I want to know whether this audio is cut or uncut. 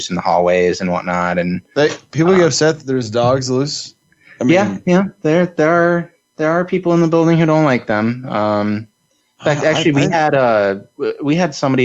uncut